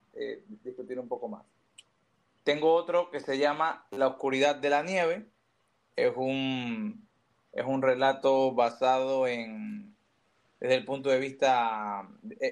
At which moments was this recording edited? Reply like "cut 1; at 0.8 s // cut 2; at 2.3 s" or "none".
none